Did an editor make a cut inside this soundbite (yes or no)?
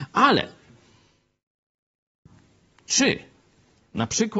no